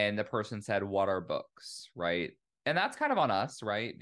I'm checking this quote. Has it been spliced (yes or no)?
no